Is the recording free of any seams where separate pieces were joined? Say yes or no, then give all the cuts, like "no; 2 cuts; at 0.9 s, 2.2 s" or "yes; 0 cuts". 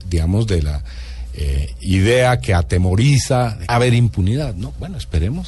no; 1 cut; at 3.7 s